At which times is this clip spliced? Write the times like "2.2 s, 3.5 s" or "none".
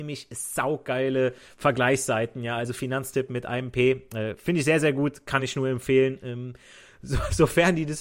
none